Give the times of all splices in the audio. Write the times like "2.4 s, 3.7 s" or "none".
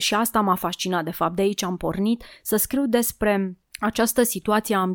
3.6 s